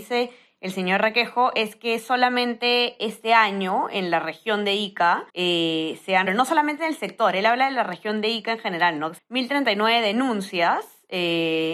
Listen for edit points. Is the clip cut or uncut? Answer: cut